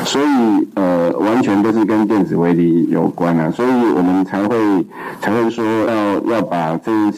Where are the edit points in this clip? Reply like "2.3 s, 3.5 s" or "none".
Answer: 5.9 s